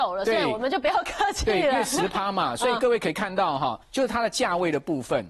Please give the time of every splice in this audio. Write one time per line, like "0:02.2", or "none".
0:03.8